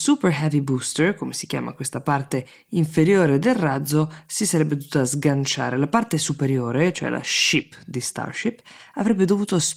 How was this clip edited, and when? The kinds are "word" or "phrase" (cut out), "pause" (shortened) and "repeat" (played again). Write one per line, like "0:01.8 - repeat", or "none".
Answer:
none